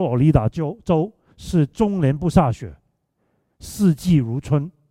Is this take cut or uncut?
uncut